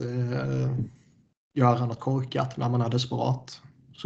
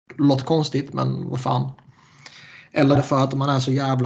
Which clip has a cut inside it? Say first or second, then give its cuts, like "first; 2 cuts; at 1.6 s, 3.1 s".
second; 1 cut; at 3.0 s